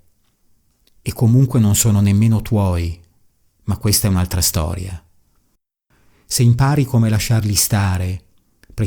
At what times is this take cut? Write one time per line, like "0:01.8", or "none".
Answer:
none

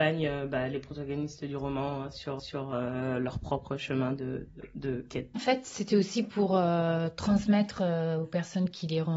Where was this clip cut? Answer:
0:02.4
0:05.4

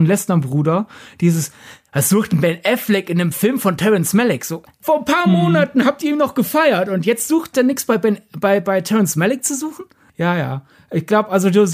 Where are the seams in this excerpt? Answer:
0:07.5

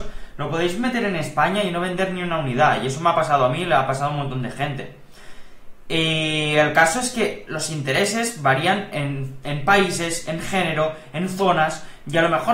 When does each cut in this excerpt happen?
none

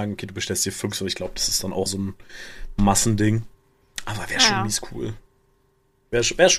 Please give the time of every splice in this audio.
0:00.9
0:01.9

